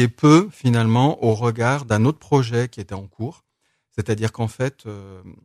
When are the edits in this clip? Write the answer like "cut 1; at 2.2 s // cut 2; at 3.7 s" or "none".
none